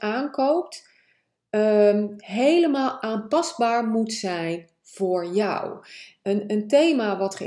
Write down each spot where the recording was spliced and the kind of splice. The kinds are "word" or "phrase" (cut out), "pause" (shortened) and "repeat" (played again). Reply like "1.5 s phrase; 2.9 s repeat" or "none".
none